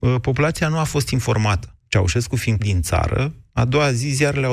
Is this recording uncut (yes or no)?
no